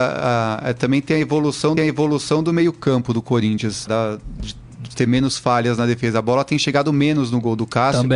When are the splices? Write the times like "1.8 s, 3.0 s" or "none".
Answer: 1.8 s, 3.9 s